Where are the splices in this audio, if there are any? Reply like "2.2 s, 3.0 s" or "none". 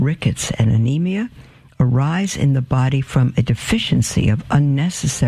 none